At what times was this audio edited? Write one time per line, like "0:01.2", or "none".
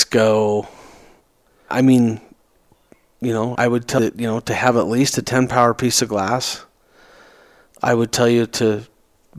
0:01.7
0:03.5
0:04.0

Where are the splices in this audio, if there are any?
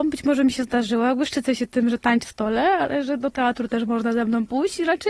0:02.2

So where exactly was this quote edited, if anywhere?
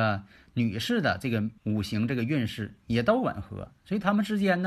0:01.6

